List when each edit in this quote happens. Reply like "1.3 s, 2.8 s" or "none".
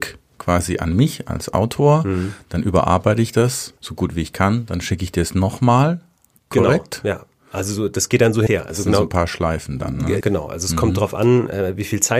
3.8 s, 8.5 s, 10.2 s